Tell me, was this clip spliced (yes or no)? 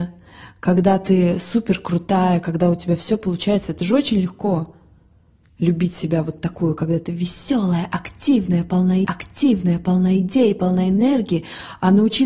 yes